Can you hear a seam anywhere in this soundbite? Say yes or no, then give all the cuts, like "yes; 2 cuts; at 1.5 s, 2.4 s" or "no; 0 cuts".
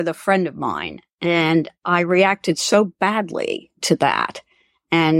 yes; 2 cuts; at 1.7 s, 3.7 s